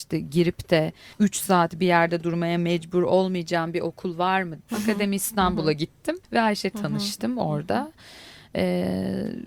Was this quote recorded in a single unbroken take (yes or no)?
no